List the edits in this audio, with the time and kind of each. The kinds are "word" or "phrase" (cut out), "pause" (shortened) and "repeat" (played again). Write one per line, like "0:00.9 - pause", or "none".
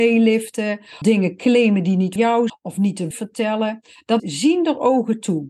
0:01.0 - word
0:02.2 - word
0:02.5 - word
0:03.1 - word
0:04.2 - word